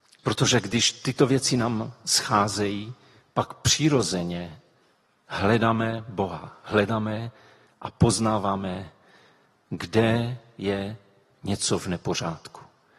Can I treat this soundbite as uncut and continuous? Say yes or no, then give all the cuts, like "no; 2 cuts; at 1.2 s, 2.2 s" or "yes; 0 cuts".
yes; 0 cuts